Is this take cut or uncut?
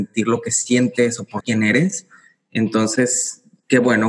cut